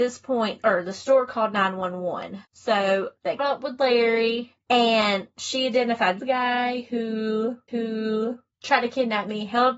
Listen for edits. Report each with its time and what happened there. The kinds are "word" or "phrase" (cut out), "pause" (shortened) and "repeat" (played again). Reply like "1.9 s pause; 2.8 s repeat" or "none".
2.4 s pause; 3.4 s word; 4.6 s pause; 6.2 s phrase; 7.7 s repeat